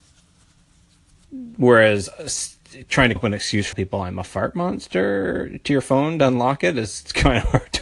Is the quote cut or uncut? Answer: cut